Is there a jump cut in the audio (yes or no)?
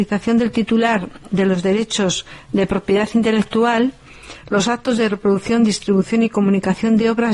no